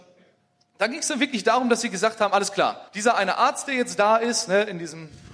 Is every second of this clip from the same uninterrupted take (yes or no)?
no